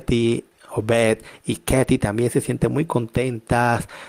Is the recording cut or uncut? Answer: uncut